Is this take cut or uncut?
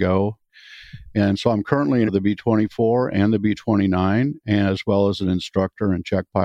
cut